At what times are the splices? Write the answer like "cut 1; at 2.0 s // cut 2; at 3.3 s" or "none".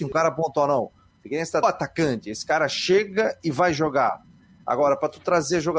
cut 1; at 1.6 s